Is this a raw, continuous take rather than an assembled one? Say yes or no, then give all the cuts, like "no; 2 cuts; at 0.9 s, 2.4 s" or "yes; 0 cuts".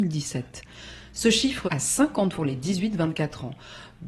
no; 2 cuts; at 1.7 s, 2.3 s